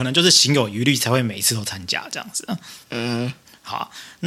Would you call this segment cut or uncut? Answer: cut